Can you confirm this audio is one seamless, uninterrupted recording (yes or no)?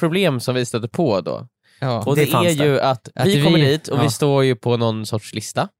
yes